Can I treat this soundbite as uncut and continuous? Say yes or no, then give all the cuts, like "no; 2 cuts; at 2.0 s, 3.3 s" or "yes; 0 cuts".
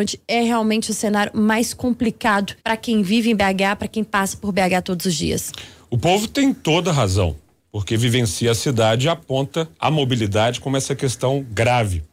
no; 1 cut; at 2.6 s